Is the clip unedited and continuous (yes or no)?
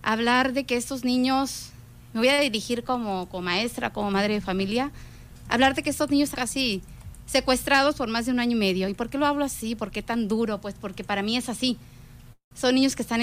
no